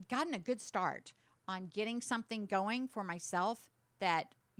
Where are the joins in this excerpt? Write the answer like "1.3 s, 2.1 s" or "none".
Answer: none